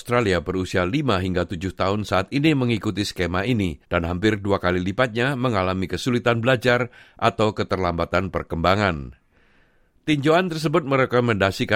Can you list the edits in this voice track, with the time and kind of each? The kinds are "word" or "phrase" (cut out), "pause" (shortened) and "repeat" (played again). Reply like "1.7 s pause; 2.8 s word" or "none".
3.8 s pause